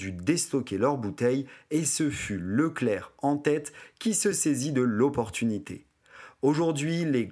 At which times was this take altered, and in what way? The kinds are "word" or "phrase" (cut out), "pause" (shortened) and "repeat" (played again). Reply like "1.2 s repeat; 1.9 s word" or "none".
none